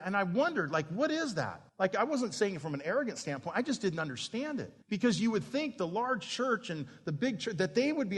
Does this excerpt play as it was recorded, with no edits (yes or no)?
no